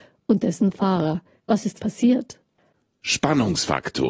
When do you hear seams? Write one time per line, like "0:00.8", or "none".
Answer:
0:01.8